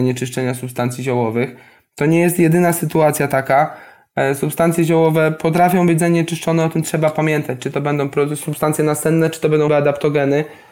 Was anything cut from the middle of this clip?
yes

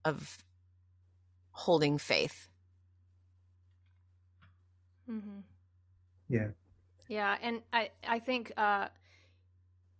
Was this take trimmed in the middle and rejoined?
no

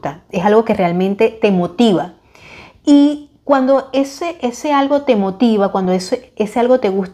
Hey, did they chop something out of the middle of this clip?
no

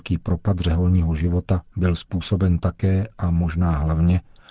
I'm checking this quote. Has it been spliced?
no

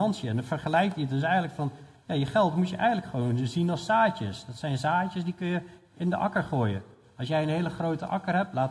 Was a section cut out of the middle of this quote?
no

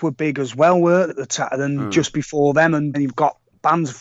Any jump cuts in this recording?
yes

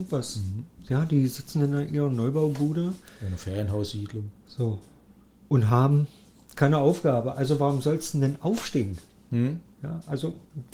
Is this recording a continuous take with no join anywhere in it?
yes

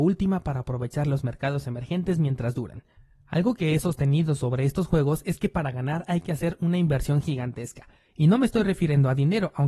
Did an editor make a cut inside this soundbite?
no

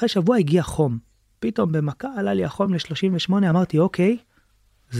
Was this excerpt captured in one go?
yes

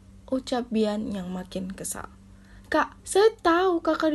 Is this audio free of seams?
no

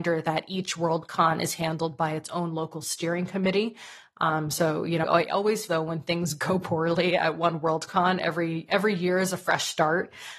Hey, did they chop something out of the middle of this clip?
yes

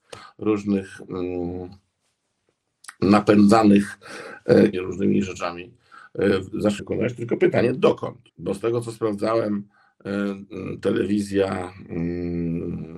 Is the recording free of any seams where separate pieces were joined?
no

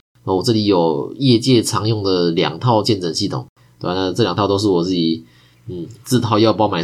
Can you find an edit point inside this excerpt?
no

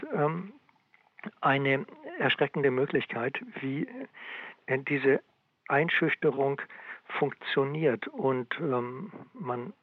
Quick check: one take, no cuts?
yes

